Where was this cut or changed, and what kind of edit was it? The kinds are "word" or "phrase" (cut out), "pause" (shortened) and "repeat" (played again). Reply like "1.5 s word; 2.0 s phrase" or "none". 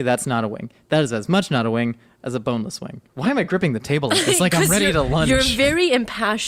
3.1 s pause